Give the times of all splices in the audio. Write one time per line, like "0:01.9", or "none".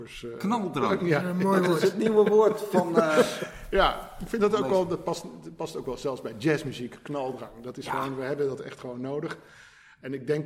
none

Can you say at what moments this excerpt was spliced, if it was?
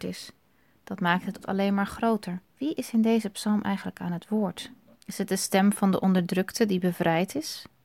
0:01.4
0:02.5
0:04.9

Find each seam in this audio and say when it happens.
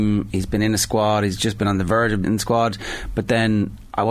0:02.2

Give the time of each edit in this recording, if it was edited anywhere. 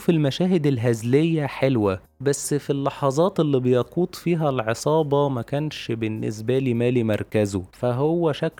none

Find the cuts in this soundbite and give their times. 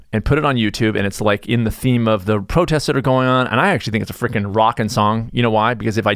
none

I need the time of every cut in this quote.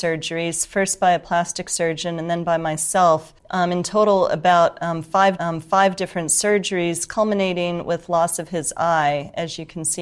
0:03.4
0:05.4

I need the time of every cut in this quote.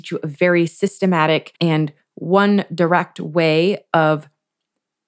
0:01.6

